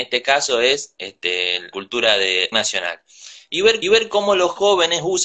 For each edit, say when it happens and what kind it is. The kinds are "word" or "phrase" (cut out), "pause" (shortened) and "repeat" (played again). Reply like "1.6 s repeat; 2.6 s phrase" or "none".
1.7 s word; 2.5 s phrase; 3.8 s repeat